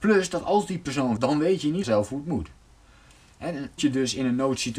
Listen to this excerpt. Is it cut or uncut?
cut